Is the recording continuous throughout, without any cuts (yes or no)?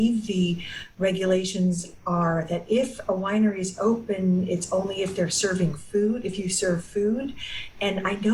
yes